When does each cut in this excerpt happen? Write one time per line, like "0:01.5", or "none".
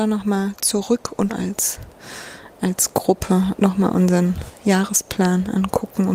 0:01.3
0:03.6